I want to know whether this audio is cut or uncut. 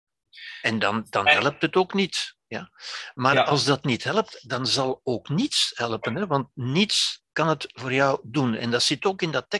cut